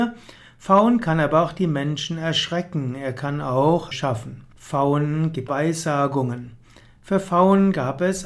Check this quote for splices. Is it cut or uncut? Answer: cut